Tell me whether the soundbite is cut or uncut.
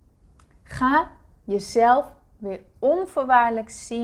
uncut